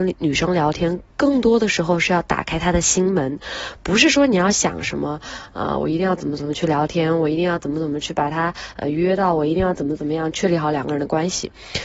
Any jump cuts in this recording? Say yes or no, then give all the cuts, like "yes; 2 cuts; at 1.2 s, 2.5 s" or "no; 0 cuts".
no; 0 cuts